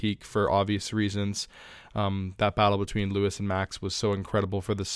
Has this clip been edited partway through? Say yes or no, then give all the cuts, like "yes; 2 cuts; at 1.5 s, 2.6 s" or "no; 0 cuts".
no; 0 cuts